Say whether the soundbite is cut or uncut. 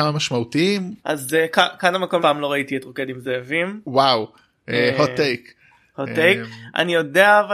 cut